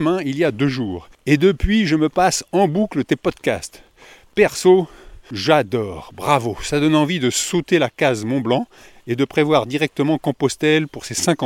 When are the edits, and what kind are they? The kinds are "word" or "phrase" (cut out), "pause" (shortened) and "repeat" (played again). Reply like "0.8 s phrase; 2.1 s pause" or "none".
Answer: 1.1 s pause